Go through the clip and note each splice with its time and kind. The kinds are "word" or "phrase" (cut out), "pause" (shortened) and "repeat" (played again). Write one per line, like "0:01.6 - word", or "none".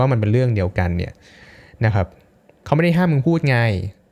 none